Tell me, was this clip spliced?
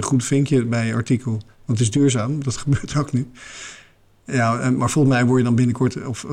no; 0 cuts

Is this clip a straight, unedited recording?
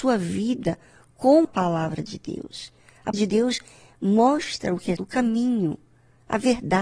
no; 3 cuts; at 1.4 s, 3.1 s, 5.0 s

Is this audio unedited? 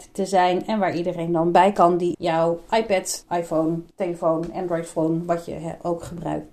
no; 3 cuts; at 2.1 s, 3.2 s, 3.9 s

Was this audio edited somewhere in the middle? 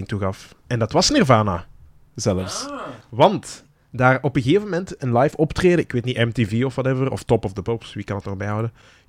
no; 0 cuts

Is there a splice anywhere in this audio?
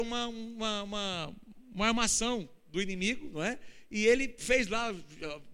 no; 0 cuts

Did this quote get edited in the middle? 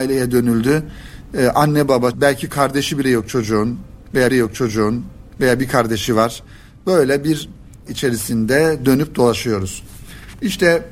yes; 3 cuts; at 2.1 s, 4.3 s, 7.9 s

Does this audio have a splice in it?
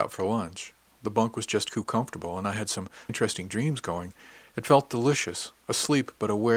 yes; 1 cut; at 3.1 s

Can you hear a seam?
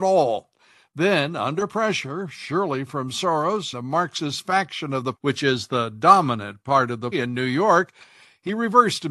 yes; 3 cuts; at 3.7 s, 5.1 s, 7.1 s

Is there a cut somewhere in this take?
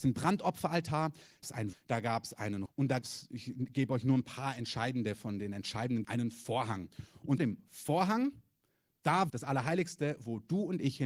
yes; 7 cuts; at 1.4 s, 1.7 s, 2.7 s, 3.0 s, 6.0 s, 7.4 s, 9.3 s

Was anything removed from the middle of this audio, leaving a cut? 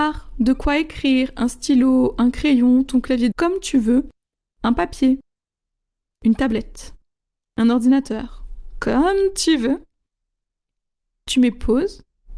yes; 1 cut; at 3.3 s

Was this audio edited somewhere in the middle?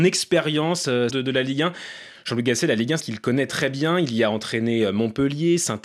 yes; 3 cuts; at 1.1 s, 3.0 s, 3.5 s

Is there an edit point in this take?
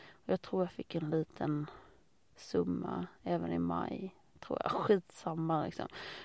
no; 0 cuts

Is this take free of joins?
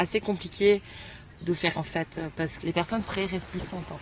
no; 4 cuts; at 1.3 s, 1.7 s, 2.6 s, 3.0 s

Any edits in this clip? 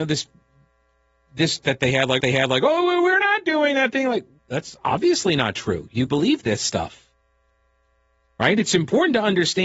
yes; 4 cuts; at 1.6 s, 2.2 s, 4.4 s, 6.1 s

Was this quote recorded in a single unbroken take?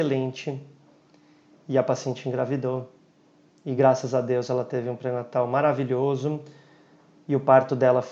yes; 0 cuts

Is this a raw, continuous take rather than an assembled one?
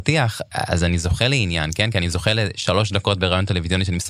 yes; 0 cuts

